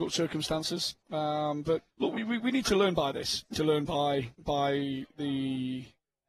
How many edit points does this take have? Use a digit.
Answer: 4